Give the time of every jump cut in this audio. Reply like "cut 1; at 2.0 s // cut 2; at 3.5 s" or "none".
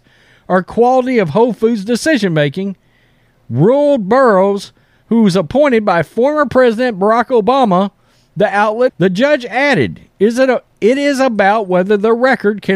cut 1; at 8.9 s